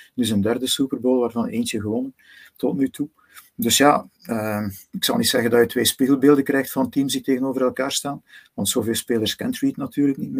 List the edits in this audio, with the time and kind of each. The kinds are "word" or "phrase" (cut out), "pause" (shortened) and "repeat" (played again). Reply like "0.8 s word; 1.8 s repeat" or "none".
none